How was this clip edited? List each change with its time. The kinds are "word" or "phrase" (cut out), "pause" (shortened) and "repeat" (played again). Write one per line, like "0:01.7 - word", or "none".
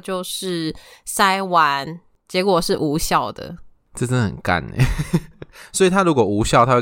none